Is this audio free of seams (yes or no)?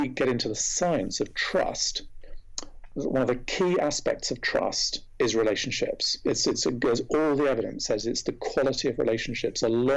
yes